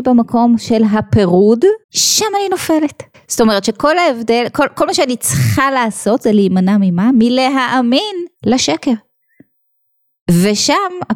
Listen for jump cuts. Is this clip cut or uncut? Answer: cut